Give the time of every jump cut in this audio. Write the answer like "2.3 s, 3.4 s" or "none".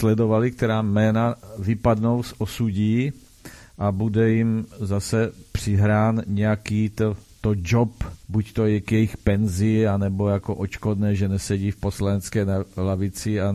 8.2 s